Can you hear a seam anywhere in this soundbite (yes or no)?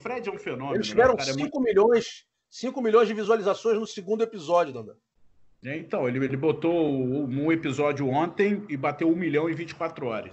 no